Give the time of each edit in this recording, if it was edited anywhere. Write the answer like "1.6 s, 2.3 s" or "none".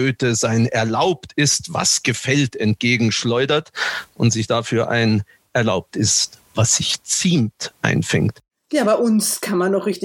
none